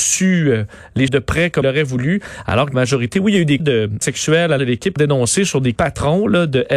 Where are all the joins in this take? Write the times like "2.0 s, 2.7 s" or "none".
1.1 s, 1.6 s, 2.7 s, 3.6 s, 4.0 s, 4.6 s, 5.0 s, 5.8 s

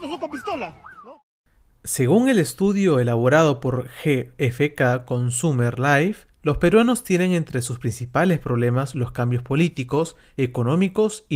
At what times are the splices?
none

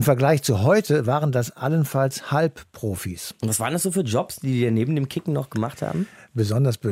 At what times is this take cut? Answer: none

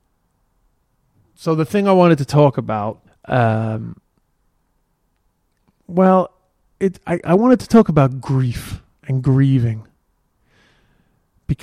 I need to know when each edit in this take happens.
3.1 s

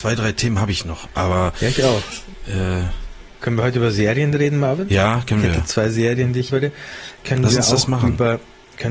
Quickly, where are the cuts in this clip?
6.5 s

